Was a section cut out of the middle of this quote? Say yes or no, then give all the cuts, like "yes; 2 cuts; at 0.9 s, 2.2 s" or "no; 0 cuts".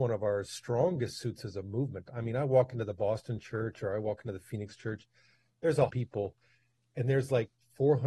yes; 1 cut; at 5.9 s